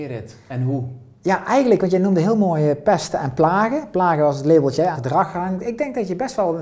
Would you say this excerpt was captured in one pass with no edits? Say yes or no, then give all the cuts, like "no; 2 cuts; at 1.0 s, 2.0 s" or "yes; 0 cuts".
no; 1 cut; at 4.9 s